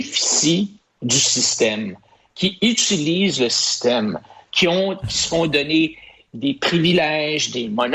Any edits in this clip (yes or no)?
no